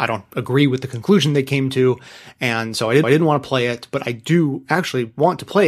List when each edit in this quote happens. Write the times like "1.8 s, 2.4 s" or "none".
3.0 s